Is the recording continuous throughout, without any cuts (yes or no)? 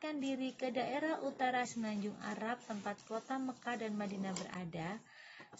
no